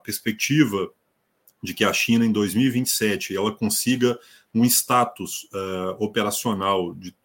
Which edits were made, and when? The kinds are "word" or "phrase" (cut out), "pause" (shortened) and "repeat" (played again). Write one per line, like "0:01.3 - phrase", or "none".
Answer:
none